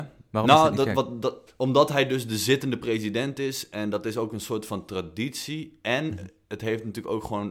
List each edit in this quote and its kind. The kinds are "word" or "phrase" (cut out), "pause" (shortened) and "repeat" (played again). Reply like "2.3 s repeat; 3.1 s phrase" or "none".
1.5 s pause